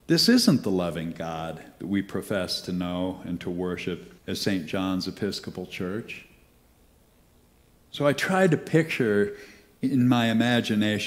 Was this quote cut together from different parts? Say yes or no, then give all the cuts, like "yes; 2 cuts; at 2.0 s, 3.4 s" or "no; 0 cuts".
yes; 1 cut; at 4.2 s